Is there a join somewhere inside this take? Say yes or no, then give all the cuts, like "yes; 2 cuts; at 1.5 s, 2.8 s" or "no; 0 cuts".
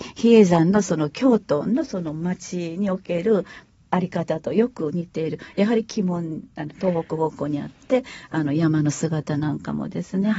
no; 0 cuts